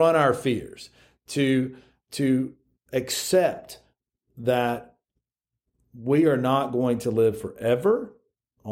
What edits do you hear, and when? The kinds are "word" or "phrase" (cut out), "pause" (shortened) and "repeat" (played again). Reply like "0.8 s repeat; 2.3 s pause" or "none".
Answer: none